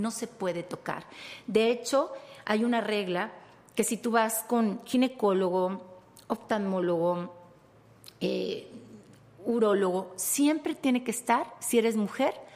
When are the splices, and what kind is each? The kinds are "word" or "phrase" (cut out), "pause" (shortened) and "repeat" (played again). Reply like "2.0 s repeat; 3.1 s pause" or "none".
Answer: none

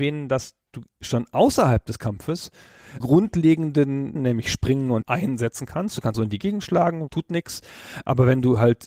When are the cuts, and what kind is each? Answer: 3.0 s word; 4.2 s word; 5.0 s word; 6.1 s word

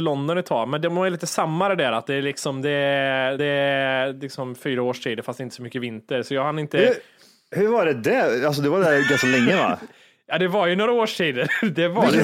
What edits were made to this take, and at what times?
3.4 s repeat

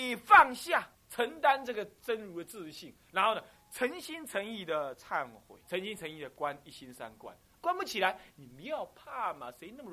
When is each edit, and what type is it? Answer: 0.9 s pause; 5.6 s pause

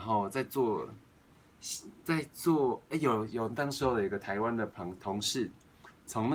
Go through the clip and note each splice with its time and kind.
none

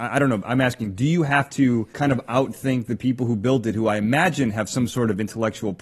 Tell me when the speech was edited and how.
1.9 s pause

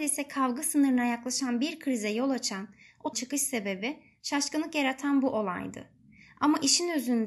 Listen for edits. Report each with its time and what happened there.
3.1 s word

